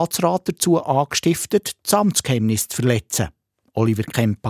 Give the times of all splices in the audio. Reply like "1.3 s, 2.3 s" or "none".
none